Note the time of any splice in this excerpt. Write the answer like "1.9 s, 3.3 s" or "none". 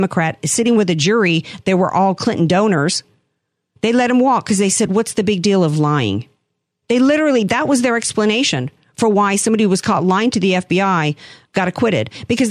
none